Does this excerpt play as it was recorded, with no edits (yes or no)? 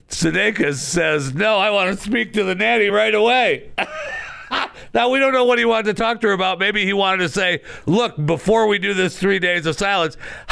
yes